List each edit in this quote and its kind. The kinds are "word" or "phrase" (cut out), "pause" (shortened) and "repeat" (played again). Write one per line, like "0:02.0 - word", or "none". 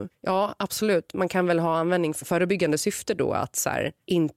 0:02.2 - phrase